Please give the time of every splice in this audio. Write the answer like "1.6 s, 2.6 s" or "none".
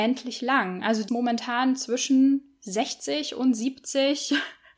1.1 s